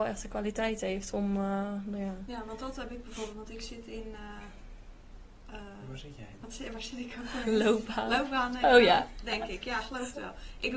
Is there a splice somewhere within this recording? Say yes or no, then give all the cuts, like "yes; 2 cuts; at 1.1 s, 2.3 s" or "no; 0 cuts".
no; 0 cuts